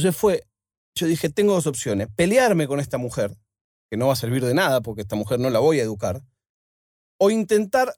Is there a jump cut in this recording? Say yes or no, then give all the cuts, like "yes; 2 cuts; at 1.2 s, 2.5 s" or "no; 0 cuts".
no; 0 cuts